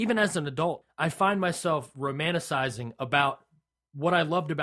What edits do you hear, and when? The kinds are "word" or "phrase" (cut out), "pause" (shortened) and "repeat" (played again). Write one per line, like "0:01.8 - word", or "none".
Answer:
none